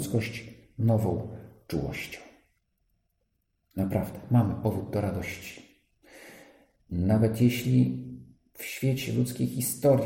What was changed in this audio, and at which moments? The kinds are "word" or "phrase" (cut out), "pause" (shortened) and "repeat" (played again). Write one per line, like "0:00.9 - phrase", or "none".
none